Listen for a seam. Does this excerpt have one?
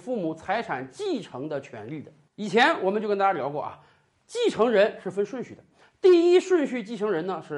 no; 0 cuts

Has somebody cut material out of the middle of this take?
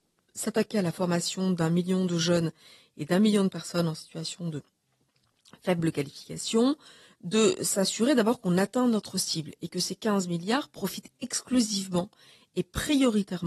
no; 0 cuts

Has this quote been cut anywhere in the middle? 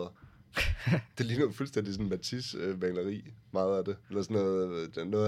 no; 0 cuts

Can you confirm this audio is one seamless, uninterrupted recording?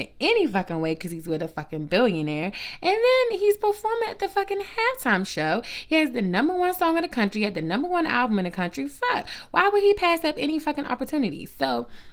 yes; 0 cuts

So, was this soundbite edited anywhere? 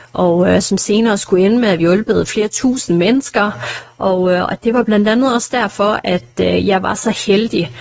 yes; 1 cut; at 1.8 s

